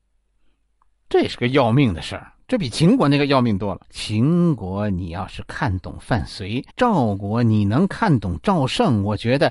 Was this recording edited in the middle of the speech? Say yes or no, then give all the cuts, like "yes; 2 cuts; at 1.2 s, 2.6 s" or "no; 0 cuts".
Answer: yes; 2 cuts; at 3.8 s, 6.7 s